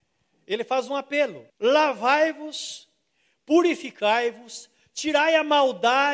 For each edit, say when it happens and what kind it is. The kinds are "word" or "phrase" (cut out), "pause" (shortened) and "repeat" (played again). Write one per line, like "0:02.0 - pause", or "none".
0:01.5 - pause